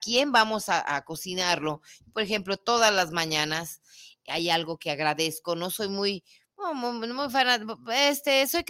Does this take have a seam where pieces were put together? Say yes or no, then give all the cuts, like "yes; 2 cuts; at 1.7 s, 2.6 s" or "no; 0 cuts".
no; 0 cuts